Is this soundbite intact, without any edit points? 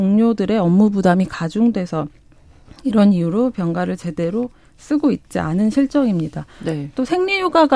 yes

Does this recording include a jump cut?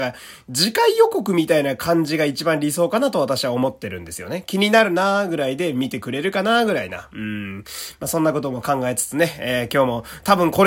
no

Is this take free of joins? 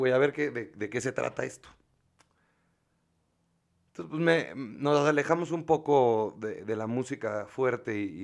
yes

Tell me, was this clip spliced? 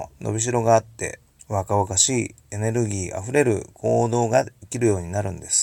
yes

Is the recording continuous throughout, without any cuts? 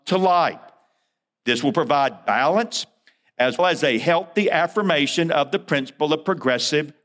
no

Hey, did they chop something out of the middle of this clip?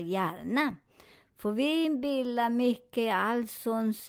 no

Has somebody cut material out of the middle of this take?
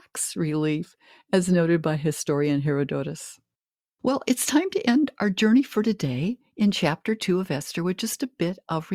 no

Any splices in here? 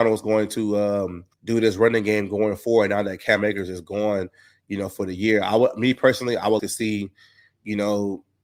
yes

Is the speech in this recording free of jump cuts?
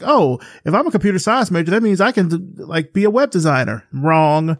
yes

